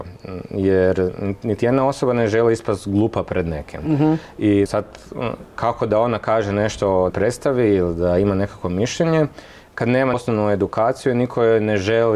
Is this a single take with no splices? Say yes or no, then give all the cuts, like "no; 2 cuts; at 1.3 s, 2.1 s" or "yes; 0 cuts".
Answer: no; 3 cuts; at 4.7 s, 7.1 s, 10.1 s